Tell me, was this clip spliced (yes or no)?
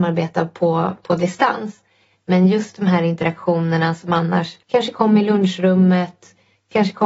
yes